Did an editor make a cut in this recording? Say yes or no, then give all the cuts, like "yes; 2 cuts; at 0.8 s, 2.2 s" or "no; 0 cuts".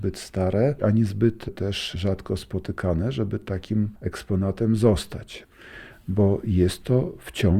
no; 0 cuts